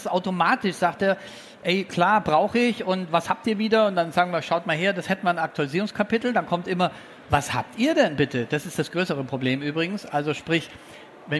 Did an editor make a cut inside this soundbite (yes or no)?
no